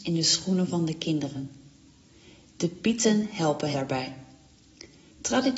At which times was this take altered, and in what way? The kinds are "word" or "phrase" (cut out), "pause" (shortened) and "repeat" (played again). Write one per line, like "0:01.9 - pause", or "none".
0:03.7 - word